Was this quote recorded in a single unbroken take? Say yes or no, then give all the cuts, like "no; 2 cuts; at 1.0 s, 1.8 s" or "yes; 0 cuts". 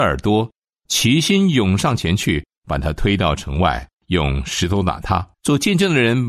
no; 2 cuts; at 3.9 s, 5.3 s